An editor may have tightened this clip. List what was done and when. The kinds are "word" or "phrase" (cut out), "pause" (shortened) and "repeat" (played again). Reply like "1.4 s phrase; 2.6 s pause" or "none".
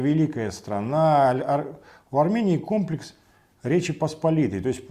none

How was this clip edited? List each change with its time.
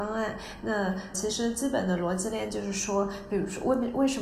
1.1 s word

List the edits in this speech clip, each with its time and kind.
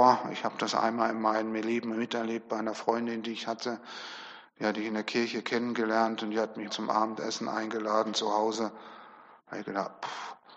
6.7 s word

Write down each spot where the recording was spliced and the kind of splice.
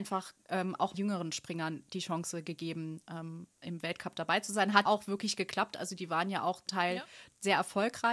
0.9 s word; 4.8 s word; 6.7 s word

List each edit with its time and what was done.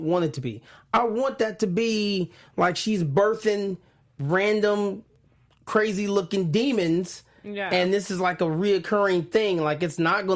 none

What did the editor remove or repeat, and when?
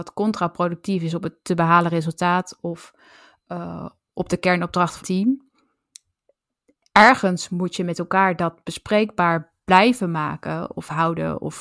5.0 s word

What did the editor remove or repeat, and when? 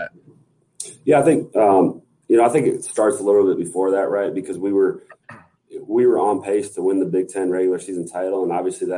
none

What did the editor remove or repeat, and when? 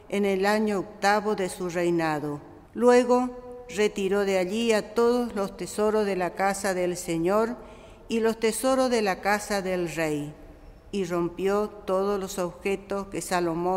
2.7 s pause

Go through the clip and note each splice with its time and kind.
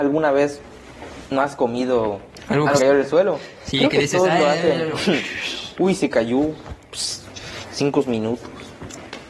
2.8 s phrase

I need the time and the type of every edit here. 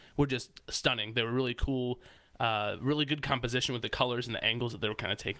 none

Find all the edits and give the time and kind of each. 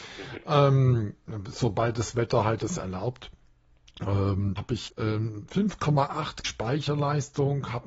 2.6 s word; 4.6 s word; 4.9 s word; 6.4 s word

